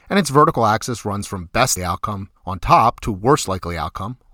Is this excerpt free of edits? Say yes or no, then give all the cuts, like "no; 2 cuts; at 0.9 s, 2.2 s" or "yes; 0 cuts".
no; 2 cuts; at 1.8 s, 2.4 s